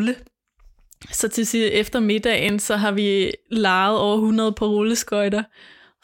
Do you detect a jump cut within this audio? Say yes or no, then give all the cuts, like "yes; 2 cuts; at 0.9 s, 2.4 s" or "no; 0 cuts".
no; 0 cuts